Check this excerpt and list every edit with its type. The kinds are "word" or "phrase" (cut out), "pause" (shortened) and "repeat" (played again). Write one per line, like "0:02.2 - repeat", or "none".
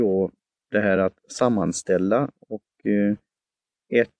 none